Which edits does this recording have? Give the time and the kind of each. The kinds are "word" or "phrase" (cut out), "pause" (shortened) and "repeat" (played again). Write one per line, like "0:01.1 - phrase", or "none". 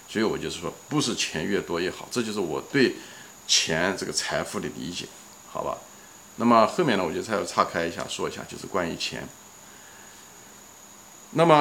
none